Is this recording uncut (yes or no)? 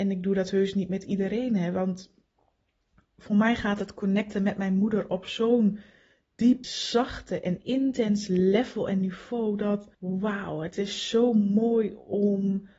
no